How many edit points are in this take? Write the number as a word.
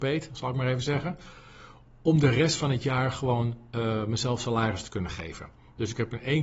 zero